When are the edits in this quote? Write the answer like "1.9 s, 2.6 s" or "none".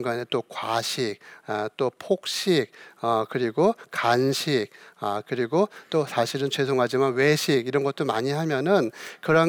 none